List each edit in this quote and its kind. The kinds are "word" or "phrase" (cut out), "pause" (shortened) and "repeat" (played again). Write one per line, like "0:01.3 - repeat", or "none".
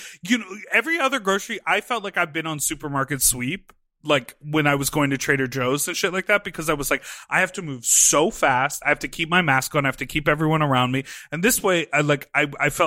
none